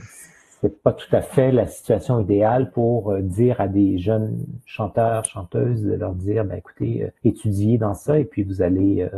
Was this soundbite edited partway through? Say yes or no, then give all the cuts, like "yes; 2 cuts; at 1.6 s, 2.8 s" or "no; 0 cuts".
yes; 1 cut; at 7.2 s